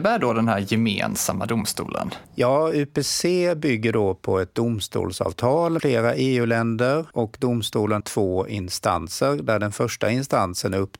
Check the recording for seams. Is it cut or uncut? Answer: cut